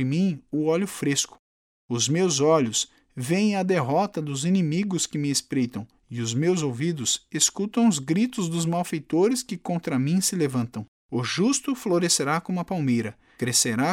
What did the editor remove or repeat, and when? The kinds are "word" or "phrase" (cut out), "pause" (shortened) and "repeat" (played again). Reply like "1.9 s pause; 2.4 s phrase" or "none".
none

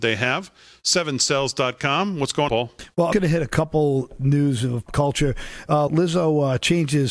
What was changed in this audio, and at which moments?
2.5 s word; 3.1 s word; 4.9 s word; 5.9 s word

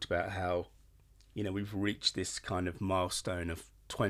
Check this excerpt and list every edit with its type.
none

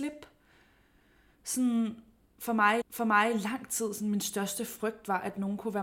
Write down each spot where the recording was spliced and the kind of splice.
2.8 s repeat

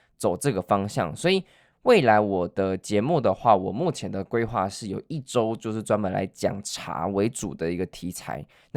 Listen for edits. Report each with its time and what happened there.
none

